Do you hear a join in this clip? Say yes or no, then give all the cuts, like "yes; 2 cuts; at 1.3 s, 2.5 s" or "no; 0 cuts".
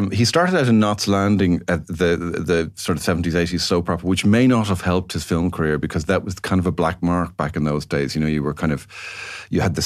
no; 0 cuts